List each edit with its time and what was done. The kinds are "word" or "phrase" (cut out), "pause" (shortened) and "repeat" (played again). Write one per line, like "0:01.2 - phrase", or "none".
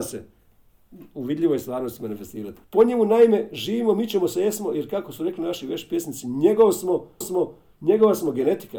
0:02.6 - pause
0:07.2 - repeat